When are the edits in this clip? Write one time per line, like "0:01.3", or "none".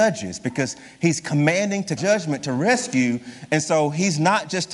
0:02.0